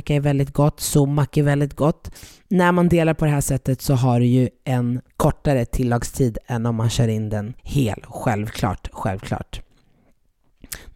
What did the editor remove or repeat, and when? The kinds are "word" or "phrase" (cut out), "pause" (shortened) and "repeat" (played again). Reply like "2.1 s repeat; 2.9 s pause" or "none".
5.1 s pause; 7.6 s pause